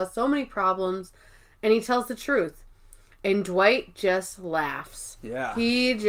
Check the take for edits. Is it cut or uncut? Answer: uncut